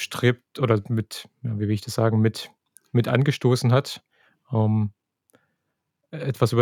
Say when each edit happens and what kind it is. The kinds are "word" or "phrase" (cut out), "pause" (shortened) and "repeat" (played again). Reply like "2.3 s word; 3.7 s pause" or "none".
none